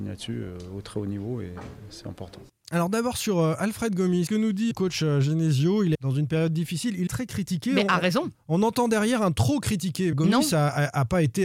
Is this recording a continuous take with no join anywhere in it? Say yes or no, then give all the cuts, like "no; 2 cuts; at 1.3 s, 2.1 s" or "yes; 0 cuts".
no; 5 cuts; at 4.3 s, 4.7 s, 5.9 s, 7.1 s, 10.1 s